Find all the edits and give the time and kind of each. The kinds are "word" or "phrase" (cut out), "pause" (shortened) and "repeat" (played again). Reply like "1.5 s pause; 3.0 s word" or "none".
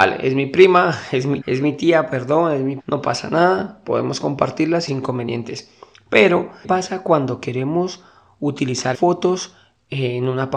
1.4 s word; 2.8 s word; 4.9 s word; 6.6 s word; 8.9 s word